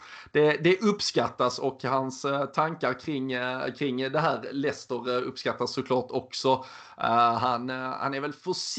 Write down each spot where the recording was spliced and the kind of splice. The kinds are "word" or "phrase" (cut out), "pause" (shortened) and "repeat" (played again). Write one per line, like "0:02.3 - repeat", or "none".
none